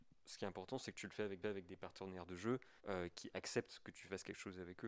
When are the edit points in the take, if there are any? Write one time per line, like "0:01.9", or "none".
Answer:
0:01.4
0:02.8